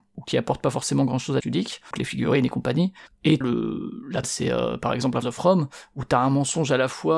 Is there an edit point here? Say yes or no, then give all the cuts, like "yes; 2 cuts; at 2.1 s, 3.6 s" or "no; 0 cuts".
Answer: yes; 5 cuts; at 1.4 s, 1.9 s, 3.4 s, 4.2 s, 5.2 s